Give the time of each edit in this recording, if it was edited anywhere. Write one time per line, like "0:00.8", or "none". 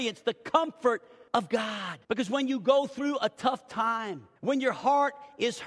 0:01.3
0:02.0
0:04.4